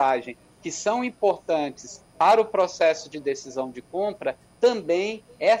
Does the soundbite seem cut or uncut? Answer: uncut